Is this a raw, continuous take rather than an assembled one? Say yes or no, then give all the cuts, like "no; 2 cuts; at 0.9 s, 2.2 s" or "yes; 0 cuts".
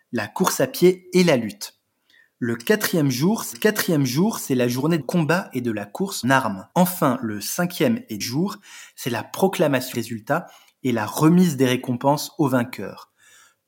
no; 6 cuts; at 3.5 s, 5.0 s, 6.2 s, 6.7 s, 8.2 s, 9.9 s